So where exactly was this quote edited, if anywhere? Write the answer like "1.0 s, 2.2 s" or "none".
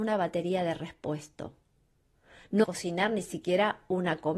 2.6 s